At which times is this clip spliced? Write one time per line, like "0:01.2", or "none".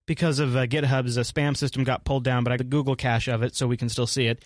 0:02.6

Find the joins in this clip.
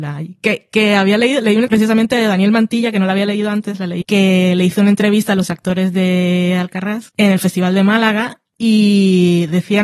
0:01.7
0:04.0

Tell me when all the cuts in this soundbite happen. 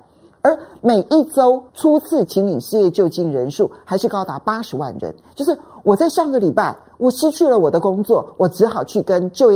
0:01.7

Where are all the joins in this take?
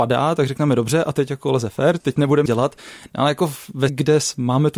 0:02.0
0:02.5
0:03.9

